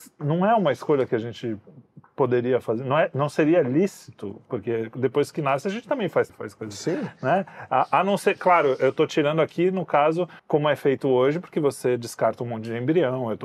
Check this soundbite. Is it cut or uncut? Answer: cut